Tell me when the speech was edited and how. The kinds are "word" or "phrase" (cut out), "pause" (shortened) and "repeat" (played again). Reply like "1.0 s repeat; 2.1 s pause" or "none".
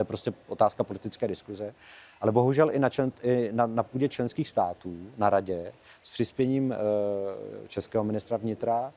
none